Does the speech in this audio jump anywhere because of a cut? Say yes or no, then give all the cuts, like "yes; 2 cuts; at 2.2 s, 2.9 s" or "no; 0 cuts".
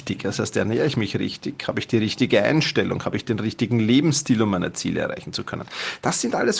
no; 0 cuts